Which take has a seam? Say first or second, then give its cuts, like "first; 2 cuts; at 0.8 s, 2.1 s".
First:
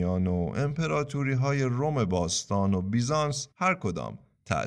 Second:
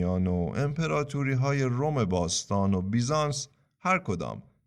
first; 1 cut; at 3.5 s